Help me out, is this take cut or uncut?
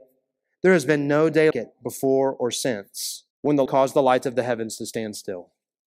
cut